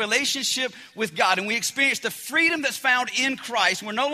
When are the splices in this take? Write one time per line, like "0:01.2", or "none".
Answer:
none